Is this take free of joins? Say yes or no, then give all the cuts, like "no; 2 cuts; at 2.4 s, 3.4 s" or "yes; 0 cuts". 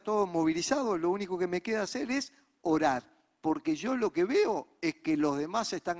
yes; 0 cuts